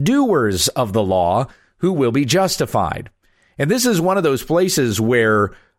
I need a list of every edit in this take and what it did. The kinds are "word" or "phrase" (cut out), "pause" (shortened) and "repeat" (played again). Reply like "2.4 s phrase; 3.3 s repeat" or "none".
none